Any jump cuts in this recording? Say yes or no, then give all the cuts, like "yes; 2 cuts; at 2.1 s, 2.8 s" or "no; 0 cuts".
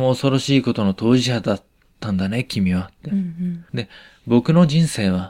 yes; 1 cut; at 3.7 s